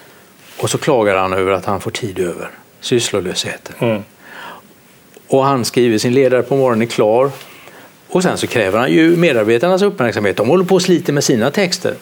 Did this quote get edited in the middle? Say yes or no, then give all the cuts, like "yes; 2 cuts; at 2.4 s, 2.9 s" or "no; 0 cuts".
no; 0 cuts